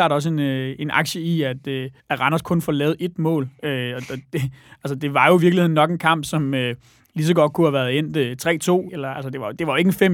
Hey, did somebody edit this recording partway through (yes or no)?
yes